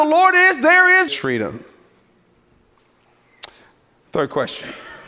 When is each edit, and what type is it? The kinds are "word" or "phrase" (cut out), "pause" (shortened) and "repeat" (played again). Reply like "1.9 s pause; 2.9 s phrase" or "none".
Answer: 1.1 s phrase